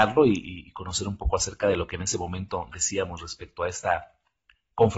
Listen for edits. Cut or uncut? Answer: uncut